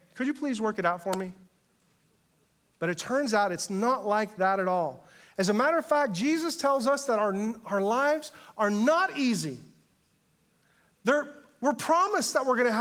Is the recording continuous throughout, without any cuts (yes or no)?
yes